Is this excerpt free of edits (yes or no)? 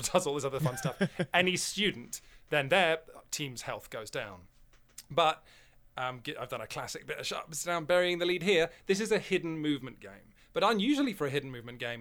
yes